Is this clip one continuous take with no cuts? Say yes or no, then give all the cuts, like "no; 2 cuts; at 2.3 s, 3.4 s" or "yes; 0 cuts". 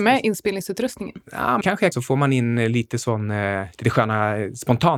no; 3 cuts; at 1.6 s, 1.9 s, 3.7 s